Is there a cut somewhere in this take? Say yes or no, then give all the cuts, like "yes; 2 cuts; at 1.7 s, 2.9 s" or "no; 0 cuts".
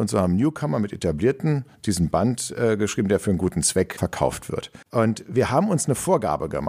yes; 1 cut; at 4.8 s